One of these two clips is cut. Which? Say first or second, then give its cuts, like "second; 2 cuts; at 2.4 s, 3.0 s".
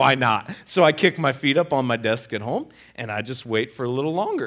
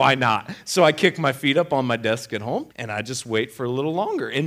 second; 1 cut; at 2.7 s